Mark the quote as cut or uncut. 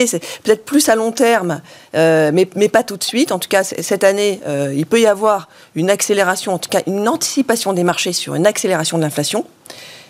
uncut